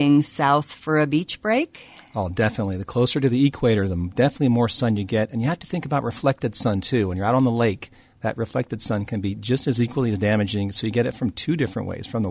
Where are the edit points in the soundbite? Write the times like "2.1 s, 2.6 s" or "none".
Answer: none